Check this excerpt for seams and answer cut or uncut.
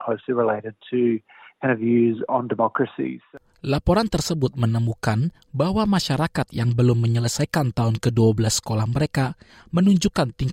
uncut